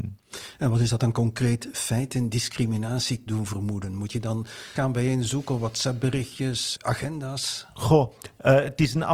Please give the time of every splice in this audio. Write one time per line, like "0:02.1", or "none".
0:02.3
0:03.3
0:04.7
0:06.7